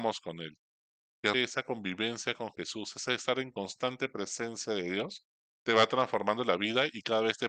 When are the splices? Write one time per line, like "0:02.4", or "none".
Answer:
0:01.3

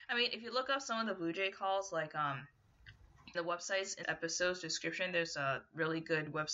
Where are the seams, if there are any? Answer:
0:03.3
0:04.0

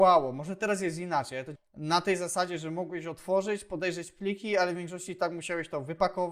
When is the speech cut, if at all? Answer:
0:01.6

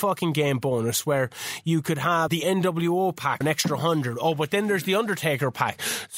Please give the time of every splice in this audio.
0:02.3
0:03.4

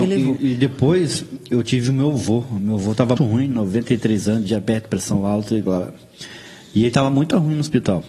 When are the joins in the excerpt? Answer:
0:03.2

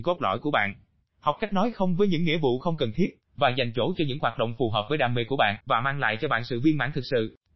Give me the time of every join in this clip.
0:05.6

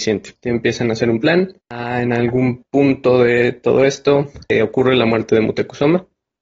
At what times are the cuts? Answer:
0:01.6
0:02.7

